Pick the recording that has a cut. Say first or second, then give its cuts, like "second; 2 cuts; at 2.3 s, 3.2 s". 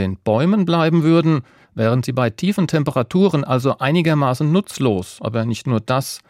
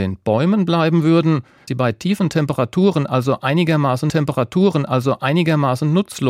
second; 2 cuts; at 1.7 s, 4.1 s